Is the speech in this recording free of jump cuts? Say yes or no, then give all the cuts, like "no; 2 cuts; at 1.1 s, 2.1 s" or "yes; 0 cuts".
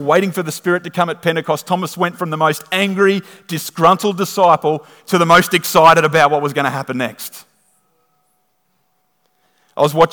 yes; 0 cuts